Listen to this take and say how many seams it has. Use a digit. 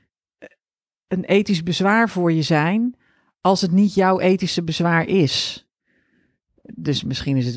0